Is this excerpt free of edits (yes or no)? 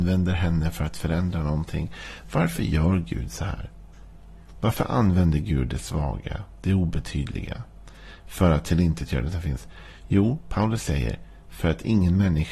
yes